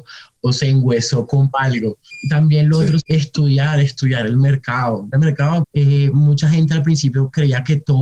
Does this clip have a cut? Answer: yes; 4 cuts; at 1.5 s, 3.0 s, 5.1 s, 5.6 s

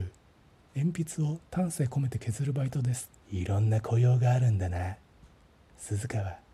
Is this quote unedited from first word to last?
no; 1 cut; at 3.2 s

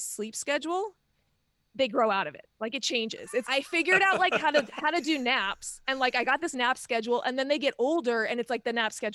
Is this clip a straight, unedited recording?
no; 1 cut; at 3.4 s

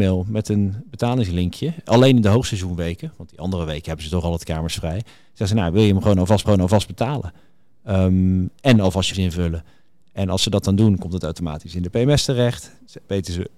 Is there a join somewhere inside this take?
yes; 2 cuts; at 6.4 s, 9.1 s

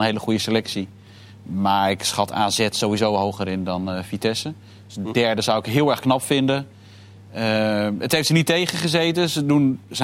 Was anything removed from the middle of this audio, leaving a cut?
no; 0 cuts

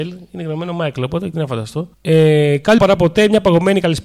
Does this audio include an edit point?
yes; 3 cuts; at 1.3 s, 1.9 s, 2.8 s

